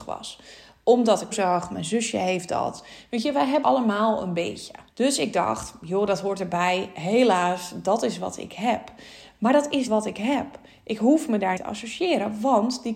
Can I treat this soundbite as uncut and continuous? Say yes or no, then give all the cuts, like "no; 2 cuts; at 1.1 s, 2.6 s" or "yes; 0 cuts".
no; 5 cuts; at 1.3 s, 3.6 s, 4.9 s, 9.9 s, 11.6 s